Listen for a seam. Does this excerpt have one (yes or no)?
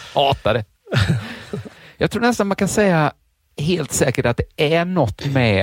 no